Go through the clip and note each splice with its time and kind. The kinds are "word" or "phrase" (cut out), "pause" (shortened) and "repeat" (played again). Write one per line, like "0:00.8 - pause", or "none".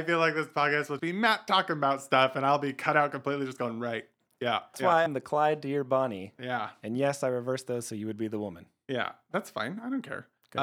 0:01.0 - word
0:04.7 - word
0:05.1 - word